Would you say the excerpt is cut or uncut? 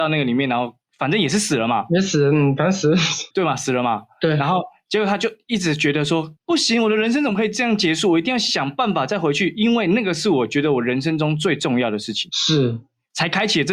cut